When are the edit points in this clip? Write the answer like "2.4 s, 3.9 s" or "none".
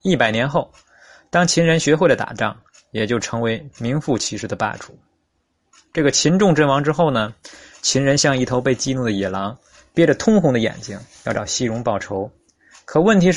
none